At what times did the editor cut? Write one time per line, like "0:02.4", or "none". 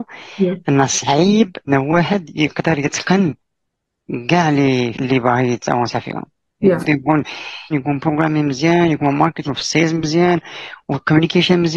0:01.7
0:04.9
0:06.8
0:07.7
0:09.5